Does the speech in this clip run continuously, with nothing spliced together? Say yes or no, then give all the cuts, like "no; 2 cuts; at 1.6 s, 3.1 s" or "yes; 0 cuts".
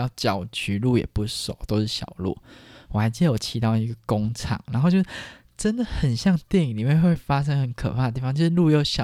yes; 0 cuts